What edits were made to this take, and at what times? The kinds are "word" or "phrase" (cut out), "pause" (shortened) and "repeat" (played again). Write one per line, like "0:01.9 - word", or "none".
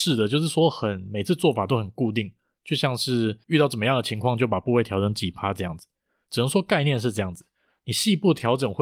0:03.4 - pause